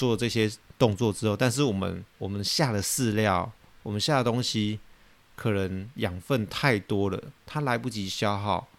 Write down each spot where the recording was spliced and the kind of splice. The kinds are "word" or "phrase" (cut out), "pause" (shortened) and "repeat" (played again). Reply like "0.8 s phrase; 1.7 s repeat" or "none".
2.2 s word